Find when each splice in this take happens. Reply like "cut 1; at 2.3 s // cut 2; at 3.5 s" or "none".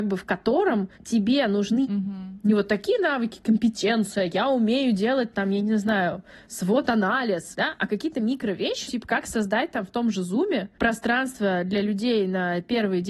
cut 1; at 0.9 s // cut 2; at 1.8 s // cut 3; at 8.9 s